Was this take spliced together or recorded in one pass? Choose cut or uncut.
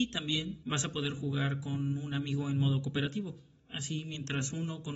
uncut